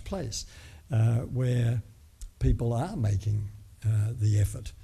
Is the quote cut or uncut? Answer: uncut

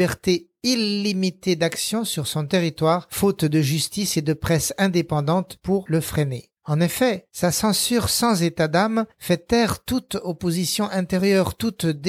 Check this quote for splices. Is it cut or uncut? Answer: cut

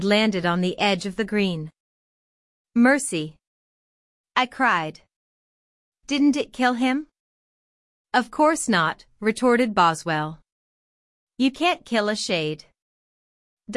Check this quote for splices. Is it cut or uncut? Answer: uncut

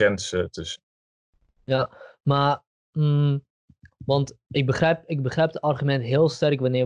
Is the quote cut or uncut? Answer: uncut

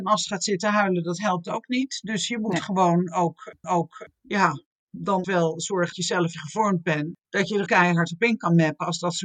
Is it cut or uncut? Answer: cut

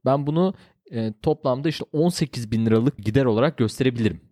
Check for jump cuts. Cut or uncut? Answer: cut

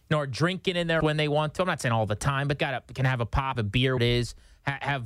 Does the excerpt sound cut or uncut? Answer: cut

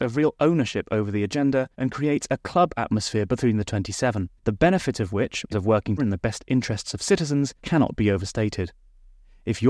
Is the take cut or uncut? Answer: cut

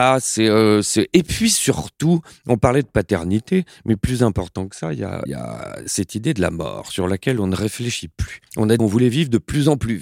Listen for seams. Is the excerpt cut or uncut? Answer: cut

